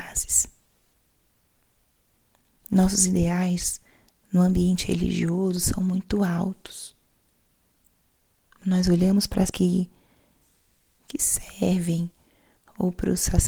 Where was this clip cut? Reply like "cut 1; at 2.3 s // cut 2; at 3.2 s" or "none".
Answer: cut 1; at 9.5 s